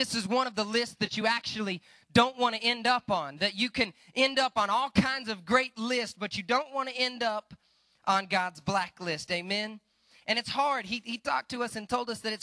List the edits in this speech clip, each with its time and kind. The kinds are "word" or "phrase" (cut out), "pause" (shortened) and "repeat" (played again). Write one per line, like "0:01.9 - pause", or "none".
none